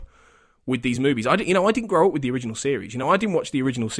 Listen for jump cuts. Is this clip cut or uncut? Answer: uncut